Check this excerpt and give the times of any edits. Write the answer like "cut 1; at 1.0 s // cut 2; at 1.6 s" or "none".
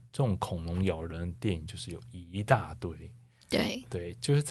none